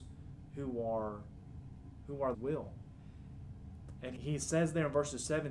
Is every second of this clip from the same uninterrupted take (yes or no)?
no